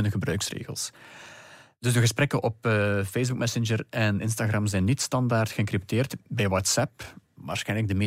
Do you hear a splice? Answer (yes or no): no